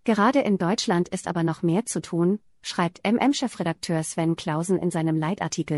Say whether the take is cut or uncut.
uncut